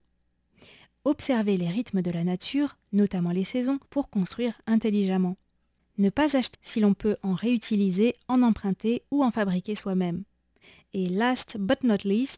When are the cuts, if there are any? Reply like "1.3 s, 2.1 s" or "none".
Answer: 3.9 s, 6.5 s